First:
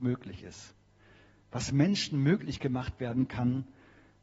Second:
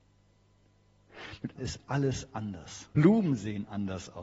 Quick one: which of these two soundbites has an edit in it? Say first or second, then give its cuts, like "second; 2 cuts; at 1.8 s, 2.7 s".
second; 2 cuts; at 1.5 s, 2.9 s